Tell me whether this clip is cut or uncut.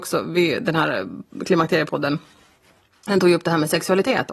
uncut